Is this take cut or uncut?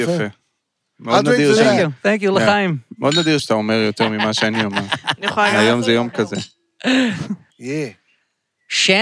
cut